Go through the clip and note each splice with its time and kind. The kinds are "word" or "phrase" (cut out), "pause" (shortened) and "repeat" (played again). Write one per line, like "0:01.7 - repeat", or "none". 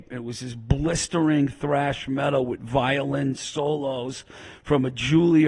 none